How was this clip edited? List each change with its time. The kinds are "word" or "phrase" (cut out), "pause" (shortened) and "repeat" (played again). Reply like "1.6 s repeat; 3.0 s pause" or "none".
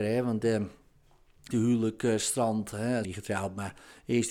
1.5 s word; 3.0 s word